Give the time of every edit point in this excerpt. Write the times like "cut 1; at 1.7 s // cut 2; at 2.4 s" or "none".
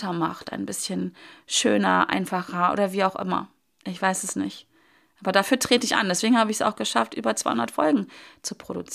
none

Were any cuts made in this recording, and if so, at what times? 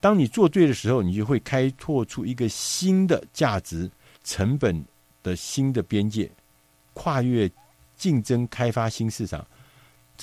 none

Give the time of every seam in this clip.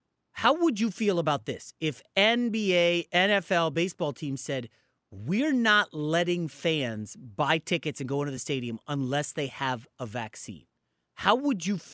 none

